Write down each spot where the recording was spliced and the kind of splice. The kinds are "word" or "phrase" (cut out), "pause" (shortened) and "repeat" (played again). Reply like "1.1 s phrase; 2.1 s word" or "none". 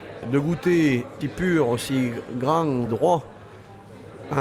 1.2 s phrase; 2.9 s word